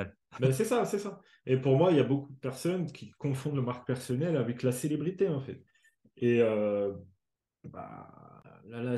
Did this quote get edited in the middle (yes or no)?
no